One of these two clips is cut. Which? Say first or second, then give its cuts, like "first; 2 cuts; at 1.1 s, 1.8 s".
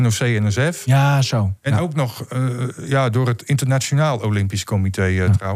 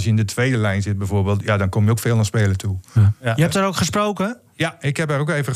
first; 1 cut; at 1.6 s